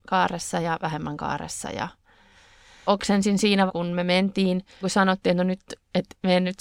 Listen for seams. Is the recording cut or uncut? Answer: cut